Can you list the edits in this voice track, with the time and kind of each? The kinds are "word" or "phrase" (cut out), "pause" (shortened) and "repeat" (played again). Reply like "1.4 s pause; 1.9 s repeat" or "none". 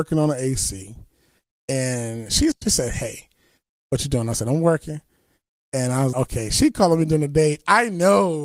2.5 s word; 6.1 s word